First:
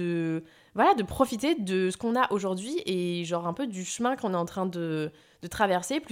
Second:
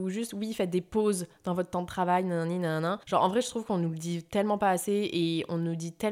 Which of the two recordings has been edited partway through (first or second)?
second